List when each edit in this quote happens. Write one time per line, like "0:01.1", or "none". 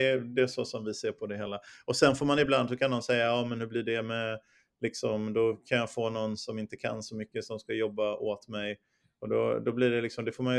none